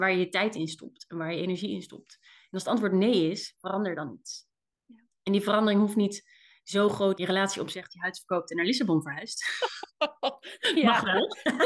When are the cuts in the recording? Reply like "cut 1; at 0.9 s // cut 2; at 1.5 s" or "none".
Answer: cut 1; at 7.2 s